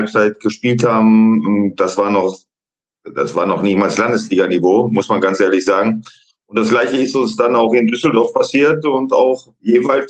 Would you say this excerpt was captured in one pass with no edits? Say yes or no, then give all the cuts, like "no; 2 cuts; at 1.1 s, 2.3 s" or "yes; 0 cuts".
yes; 0 cuts